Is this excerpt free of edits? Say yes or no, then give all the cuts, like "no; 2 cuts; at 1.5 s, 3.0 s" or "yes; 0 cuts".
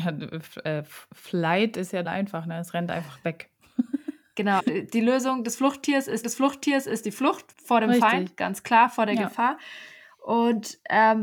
no; 4 cuts; at 2.0 s, 4.6 s, 6.2 s, 7.5 s